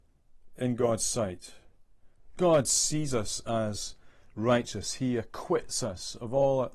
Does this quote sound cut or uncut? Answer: uncut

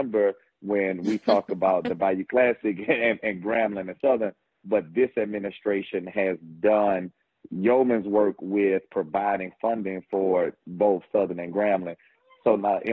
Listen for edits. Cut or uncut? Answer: uncut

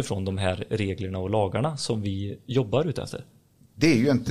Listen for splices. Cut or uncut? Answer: uncut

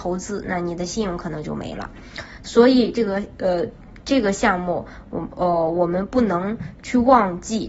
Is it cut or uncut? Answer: uncut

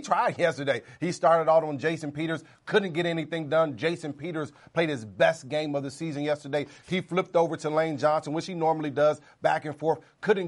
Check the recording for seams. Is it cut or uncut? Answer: uncut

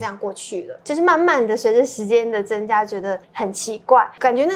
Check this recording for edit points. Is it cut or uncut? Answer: cut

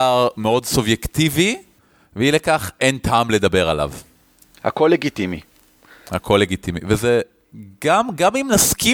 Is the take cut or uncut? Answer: uncut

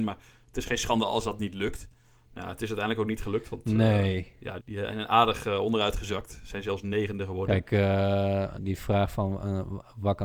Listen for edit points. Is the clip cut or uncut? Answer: cut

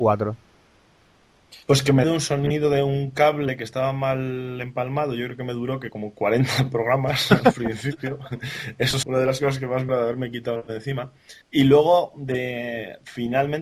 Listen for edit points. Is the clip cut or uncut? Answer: cut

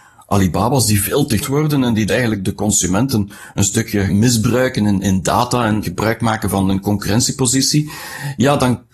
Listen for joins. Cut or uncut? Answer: cut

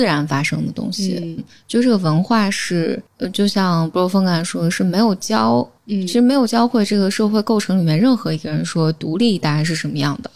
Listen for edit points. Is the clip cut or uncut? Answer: cut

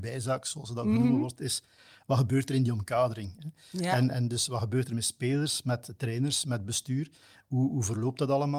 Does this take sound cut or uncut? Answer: uncut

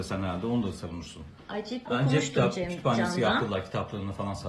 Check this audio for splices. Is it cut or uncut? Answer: cut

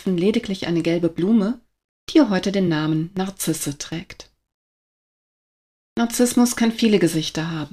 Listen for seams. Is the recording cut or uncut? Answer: uncut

